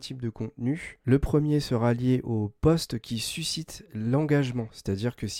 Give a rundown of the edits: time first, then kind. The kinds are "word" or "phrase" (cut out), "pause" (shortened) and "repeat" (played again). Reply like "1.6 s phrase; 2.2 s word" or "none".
none